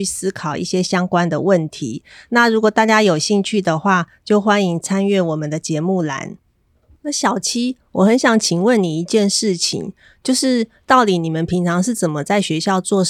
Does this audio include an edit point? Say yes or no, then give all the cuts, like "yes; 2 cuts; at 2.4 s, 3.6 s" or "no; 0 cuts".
no; 0 cuts